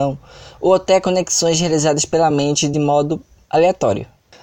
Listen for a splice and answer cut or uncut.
uncut